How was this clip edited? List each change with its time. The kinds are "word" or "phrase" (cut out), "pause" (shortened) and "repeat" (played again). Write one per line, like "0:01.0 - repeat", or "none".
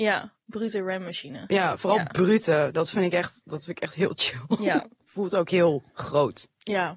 0:05.9 - pause